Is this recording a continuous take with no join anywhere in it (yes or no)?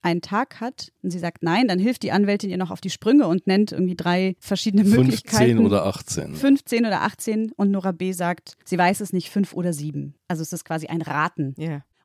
no